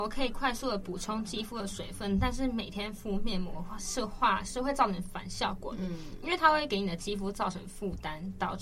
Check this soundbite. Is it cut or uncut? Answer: uncut